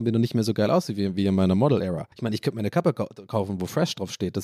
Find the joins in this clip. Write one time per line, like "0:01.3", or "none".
0:02.1